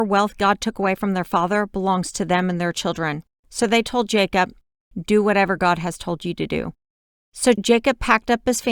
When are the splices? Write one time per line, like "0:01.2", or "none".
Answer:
none